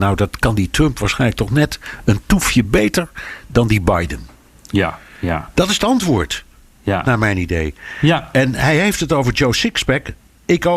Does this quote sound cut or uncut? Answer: uncut